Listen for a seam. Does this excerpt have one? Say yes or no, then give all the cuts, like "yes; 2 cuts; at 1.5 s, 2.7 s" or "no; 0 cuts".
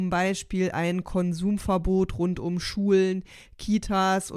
no; 0 cuts